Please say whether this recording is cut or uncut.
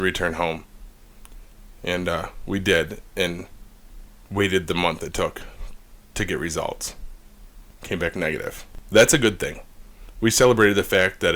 uncut